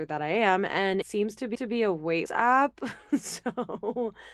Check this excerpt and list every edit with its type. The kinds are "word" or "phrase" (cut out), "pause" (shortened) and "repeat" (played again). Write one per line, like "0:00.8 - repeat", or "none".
0:01.0 - word
0:01.5 - repeat
0:02.3 - word